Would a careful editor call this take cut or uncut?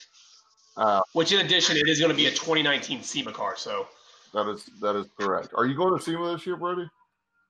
uncut